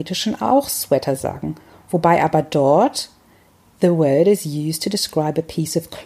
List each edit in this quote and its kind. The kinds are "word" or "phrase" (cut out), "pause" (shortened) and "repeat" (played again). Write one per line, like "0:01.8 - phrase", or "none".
none